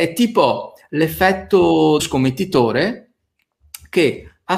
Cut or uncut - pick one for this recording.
cut